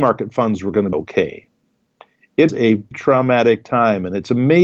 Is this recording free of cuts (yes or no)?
no